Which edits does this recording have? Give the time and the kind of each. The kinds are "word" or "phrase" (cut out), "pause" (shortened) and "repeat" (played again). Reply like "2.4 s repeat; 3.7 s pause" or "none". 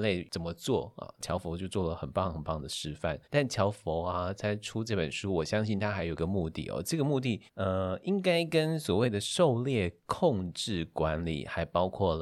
3.2 s pause; 7.5 s pause